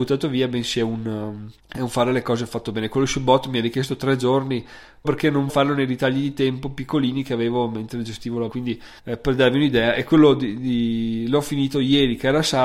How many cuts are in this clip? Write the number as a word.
five